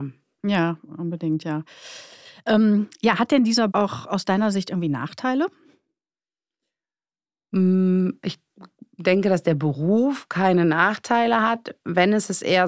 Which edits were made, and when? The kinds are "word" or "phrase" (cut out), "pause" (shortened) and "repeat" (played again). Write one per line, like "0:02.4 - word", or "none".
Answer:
0:03.7 - word